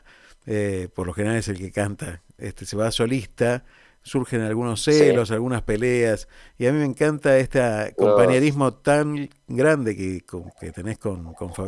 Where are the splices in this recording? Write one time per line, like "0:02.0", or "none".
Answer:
none